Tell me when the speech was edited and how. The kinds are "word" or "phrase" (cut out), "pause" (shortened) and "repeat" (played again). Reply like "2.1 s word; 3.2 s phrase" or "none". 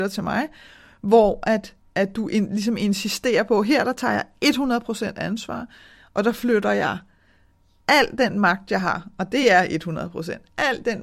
none